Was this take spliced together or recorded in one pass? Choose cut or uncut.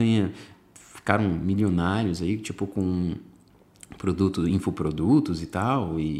uncut